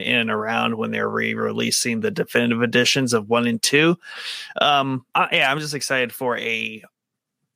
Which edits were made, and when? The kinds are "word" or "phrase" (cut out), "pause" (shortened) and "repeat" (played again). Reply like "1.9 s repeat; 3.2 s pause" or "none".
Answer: 5.1 s pause